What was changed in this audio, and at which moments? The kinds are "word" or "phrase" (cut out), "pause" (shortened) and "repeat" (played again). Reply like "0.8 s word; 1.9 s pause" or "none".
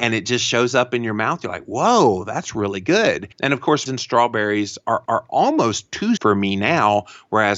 3.3 s pause; 3.9 s word; 5.1 s repeat; 6.2 s word